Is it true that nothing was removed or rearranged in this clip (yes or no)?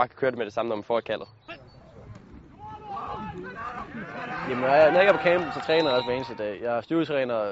yes